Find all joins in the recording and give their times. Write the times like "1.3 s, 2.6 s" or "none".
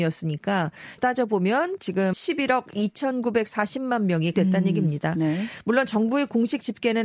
1.0 s, 2.1 s, 4.3 s